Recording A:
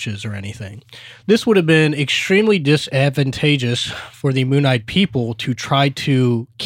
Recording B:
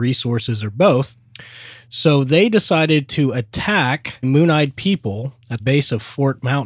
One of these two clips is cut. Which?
B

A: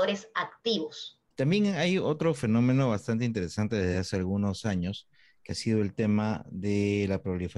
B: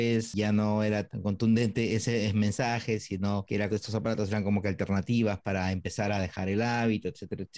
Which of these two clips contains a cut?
B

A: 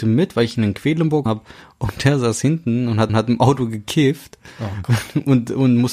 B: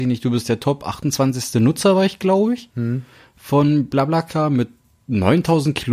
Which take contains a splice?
A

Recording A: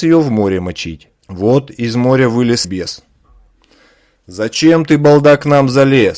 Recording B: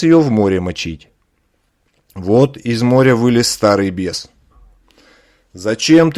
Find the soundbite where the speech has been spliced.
A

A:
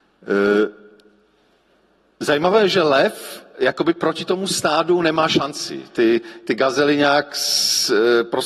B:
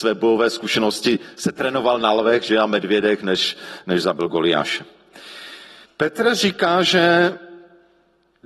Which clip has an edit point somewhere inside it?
B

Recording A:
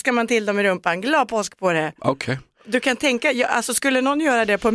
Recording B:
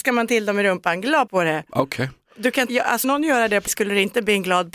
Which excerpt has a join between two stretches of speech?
B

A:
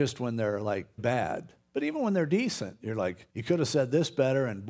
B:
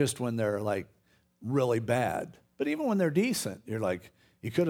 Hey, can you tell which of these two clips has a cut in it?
A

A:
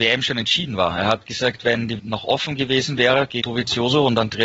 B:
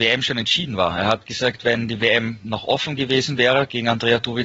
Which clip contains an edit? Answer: A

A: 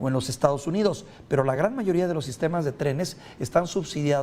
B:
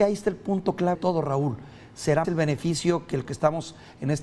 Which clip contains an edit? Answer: B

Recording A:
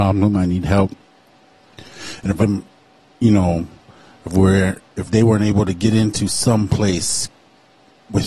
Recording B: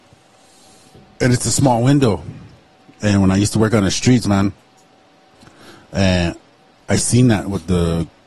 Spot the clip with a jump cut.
A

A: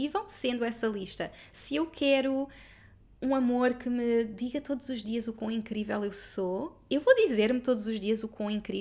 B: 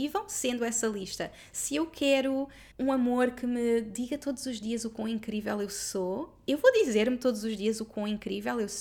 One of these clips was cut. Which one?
B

